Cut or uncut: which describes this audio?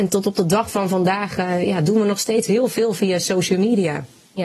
uncut